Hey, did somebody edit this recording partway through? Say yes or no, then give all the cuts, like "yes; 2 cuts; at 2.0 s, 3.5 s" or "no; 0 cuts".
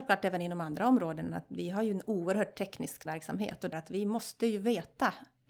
yes; 2 cuts; at 3.1 s, 3.7 s